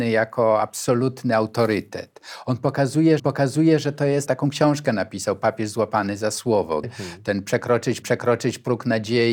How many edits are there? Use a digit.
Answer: 4